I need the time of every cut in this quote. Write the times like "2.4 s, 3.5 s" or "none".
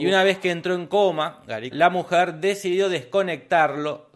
1.7 s